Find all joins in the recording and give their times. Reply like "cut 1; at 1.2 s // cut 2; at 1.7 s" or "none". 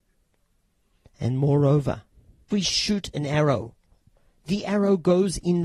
cut 1; at 2.5 s

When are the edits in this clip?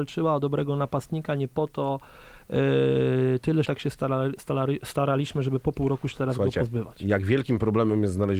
cut 1; at 3.6 s

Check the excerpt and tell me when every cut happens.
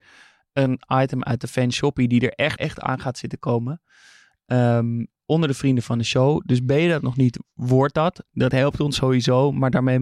cut 1; at 2.6 s // cut 2; at 5.2 s

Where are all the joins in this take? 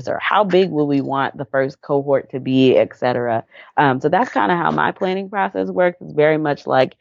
none

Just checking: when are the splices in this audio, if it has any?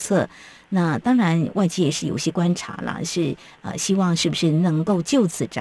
none

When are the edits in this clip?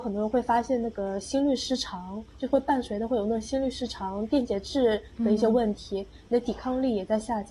none

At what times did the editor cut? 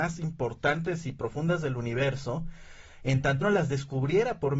cut 1; at 3.4 s

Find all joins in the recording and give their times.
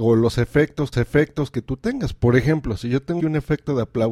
cut 1; at 0.9 s // cut 2; at 3.2 s

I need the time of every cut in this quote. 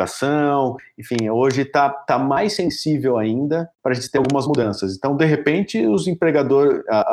cut 1; at 3.7 s

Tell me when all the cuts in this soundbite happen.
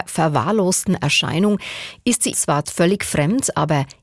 cut 1; at 2.3 s // cut 2; at 2.6 s

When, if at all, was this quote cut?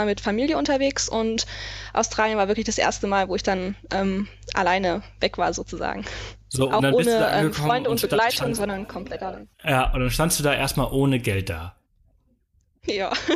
cut 1; at 6.4 s // cut 2; at 9.5 s

